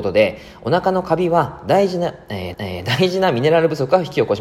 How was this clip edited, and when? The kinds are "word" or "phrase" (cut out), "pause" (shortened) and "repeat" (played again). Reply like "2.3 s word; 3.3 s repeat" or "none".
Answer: 2.5 s repeat